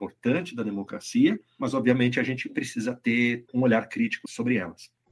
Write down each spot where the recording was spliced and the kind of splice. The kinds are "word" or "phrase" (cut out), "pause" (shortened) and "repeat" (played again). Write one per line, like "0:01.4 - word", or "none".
0:03.4 - word